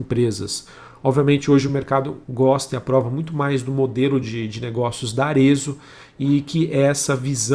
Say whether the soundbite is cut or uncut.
uncut